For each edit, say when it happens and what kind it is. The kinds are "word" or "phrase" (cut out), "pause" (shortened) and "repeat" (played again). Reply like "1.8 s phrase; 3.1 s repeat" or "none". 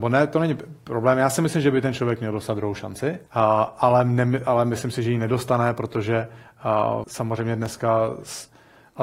3.3 s pause; 7.0 s word

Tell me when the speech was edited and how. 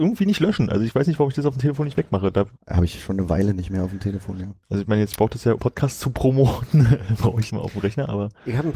2.6 s pause; 4.6 s pause; 5.6 s word; 7.5 s phrase

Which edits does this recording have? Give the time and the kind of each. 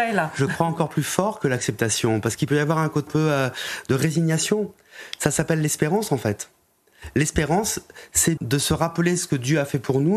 3.1 s word; 8.4 s word

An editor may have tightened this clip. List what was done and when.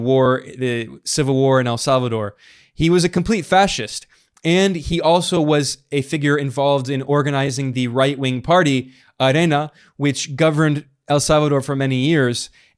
none

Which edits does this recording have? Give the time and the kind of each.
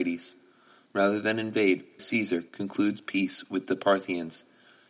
2.0 s word; 2.5 s pause

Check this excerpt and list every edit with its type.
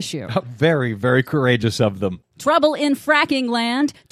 none

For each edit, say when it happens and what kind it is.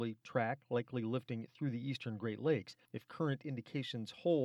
2.8 s pause

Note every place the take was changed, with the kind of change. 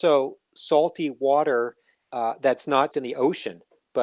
1.9 s pause; 2.9 s word

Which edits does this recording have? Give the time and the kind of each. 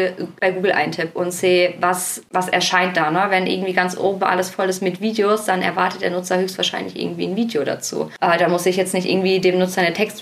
2.3 s word

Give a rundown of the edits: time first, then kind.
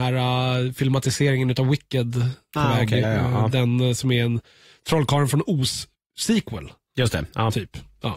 2.6 s word; 3.0 s word; 5.9 s pause

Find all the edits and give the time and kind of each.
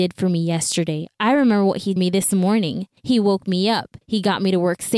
2.0 s phrase; 3.0 s pause; 4.0 s pause

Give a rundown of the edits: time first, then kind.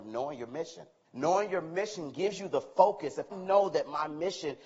1.0 s pause; 3.3 s word

